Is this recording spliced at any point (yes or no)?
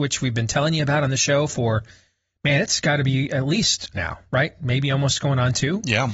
yes